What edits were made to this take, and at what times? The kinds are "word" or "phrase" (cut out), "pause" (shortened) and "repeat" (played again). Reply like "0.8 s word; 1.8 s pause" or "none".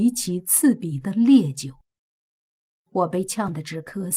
none